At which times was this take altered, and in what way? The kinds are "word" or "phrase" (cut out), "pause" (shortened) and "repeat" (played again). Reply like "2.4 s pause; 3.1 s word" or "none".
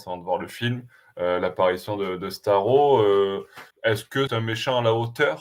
3.7 s pause; 4.3 s word